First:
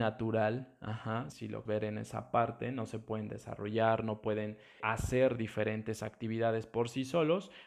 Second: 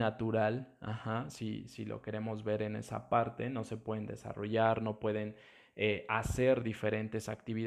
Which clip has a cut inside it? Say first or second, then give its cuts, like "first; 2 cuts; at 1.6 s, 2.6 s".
first; 3 cuts; at 1.3 s, 1.7 s, 4.8 s